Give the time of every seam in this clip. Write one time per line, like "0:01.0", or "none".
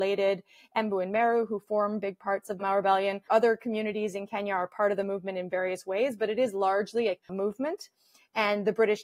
0:02.6
0:03.2
0:07.2